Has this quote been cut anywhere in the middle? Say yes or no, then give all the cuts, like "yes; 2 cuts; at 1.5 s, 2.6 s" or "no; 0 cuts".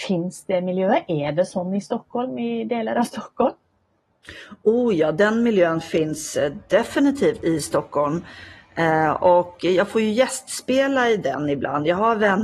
yes; 1 cut; at 7.4 s